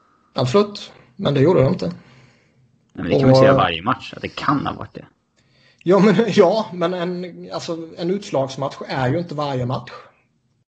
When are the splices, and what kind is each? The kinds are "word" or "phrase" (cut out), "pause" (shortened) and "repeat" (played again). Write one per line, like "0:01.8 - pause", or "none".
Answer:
none